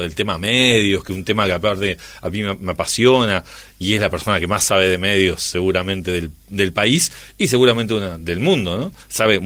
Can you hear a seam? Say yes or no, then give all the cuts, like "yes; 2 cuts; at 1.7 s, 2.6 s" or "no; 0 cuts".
no; 0 cuts